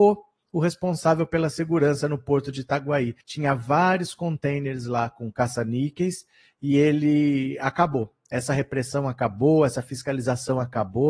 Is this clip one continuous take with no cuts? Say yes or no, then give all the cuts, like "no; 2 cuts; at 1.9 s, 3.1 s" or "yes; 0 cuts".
no; 1 cut; at 3.2 s